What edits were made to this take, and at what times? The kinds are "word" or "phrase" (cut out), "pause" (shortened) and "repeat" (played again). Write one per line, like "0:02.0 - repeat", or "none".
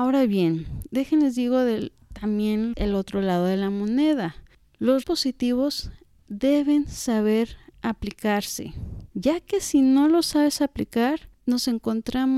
0:02.7 - phrase
0:05.0 - word
0:09.1 - pause